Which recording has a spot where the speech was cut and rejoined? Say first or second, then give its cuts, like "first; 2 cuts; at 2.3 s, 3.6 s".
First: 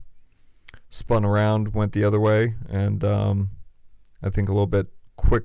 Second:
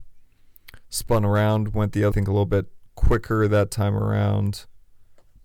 second; 1 cut; at 2.1 s